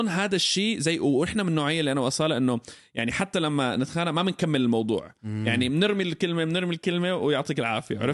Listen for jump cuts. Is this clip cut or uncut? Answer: uncut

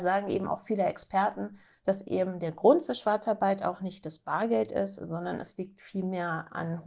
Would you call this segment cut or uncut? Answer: uncut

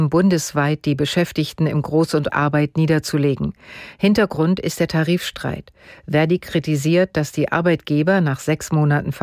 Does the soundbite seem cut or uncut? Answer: cut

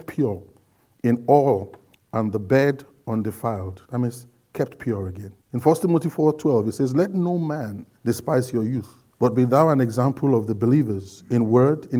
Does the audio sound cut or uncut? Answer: cut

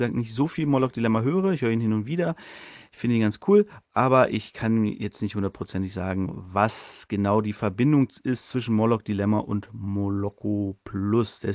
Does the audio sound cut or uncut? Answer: uncut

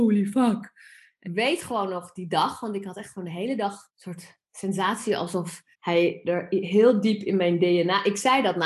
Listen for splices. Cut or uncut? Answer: cut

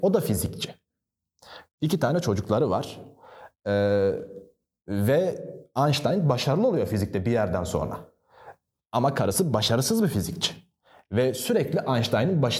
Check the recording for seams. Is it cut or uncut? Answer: uncut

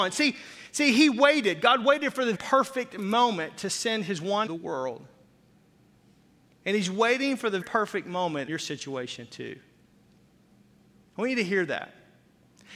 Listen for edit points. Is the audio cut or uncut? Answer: cut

